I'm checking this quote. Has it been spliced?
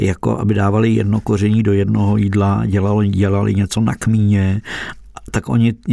no; 0 cuts

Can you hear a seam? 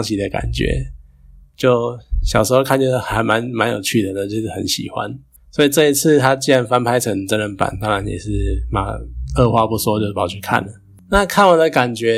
no; 0 cuts

